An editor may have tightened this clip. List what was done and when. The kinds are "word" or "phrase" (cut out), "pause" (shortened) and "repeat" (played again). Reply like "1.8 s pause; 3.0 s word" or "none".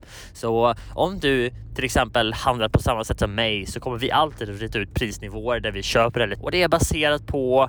6.4 s word